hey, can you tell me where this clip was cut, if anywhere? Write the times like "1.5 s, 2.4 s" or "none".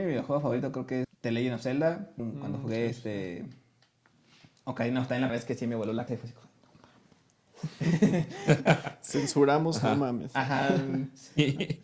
1.0 s, 2.2 s, 5.3 s, 6.1 s

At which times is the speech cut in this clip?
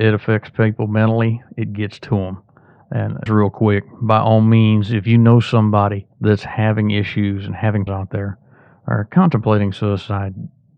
3.3 s, 6.1 s, 7.9 s

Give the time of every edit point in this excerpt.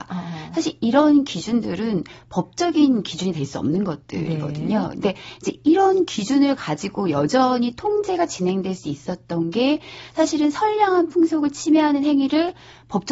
none

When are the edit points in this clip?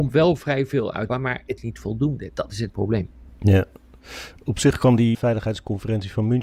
1.1 s, 1.6 s, 2.7 s, 5.1 s

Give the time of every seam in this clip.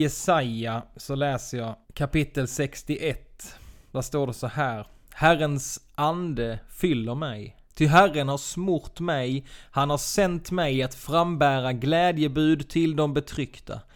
1.8 s, 7.6 s

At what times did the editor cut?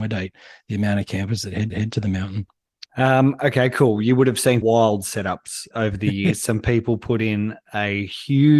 1.7 s, 2.9 s, 4.6 s, 5.7 s

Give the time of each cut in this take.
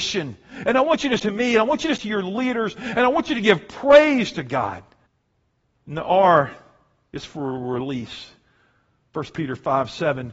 1.2 s, 2.0 s, 5.1 s

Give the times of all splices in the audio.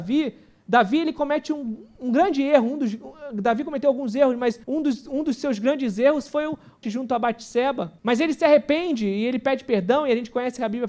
4.6 s, 6.8 s, 8.0 s

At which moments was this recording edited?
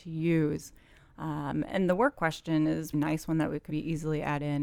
2.9 s, 3.7 s

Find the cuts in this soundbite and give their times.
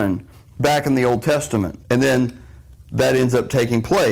1.8 s

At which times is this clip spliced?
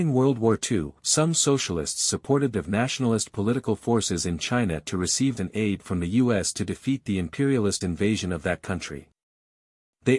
1.0 s, 2.5 s, 5.4 s, 7.8 s

